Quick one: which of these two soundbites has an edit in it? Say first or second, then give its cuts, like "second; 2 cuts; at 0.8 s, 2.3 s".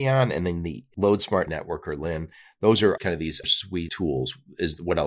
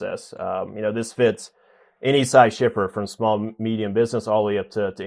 first; 4 cuts; at 1.5 s, 3.0 s, 3.4 s, 3.9 s